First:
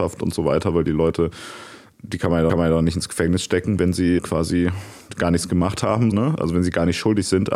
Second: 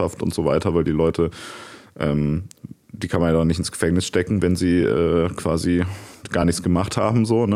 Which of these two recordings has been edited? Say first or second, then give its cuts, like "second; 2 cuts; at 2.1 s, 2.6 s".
first; 4 cuts; at 1.9 s, 2.5 s, 4.2 s, 6.1 s